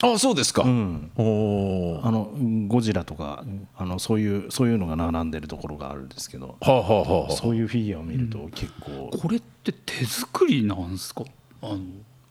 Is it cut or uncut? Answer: cut